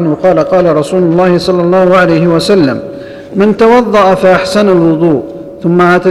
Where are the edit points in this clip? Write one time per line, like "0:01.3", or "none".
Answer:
none